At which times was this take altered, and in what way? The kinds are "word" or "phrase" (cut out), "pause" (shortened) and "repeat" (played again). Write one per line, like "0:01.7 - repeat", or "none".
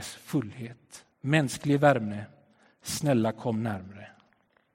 0:01.1 - pause